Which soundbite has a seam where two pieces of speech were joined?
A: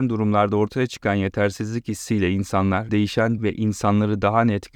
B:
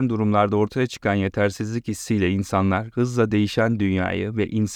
A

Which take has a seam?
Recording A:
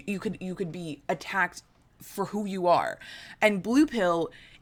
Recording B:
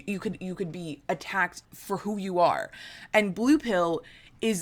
B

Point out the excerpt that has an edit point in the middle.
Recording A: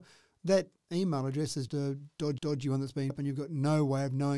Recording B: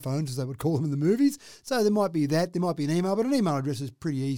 A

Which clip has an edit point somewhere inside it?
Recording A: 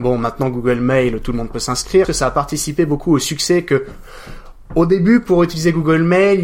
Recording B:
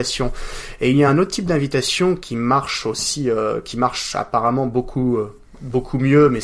A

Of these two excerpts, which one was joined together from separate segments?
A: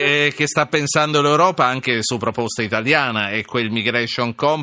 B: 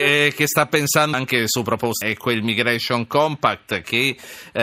B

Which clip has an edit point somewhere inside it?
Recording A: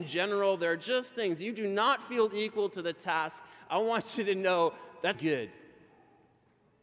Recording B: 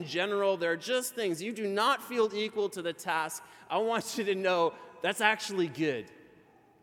A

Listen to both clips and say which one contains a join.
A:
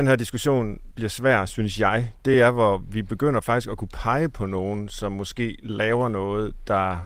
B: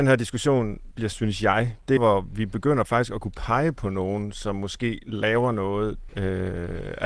B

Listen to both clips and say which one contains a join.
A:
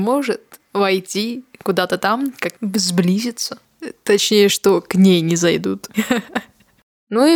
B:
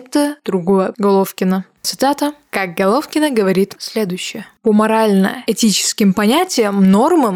B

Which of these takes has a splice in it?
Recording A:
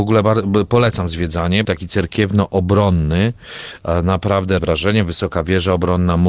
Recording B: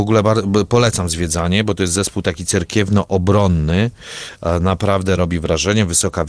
A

